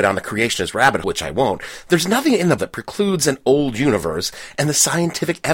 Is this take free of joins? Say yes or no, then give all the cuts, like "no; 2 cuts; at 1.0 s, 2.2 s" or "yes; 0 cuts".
no; 2 cuts; at 1.0 s, 2.6 s